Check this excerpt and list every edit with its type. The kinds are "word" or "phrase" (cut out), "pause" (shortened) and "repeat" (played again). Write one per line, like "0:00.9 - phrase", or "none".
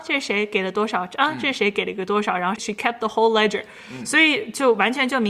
0:02.6 - word